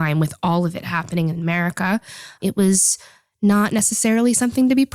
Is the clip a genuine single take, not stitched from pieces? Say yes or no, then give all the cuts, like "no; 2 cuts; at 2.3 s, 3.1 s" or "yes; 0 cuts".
yes; 0 cuts